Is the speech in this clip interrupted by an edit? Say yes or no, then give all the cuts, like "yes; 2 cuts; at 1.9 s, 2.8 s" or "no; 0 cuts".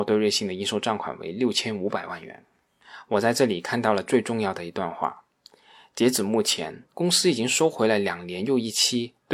yes; 1 cut; at 6.9 s